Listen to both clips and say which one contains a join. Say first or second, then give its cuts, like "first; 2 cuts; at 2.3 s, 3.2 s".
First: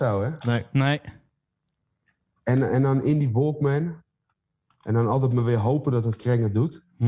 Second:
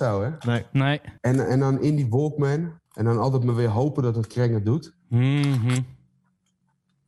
second; 2 cuts; at 1.2 s, 2.9 s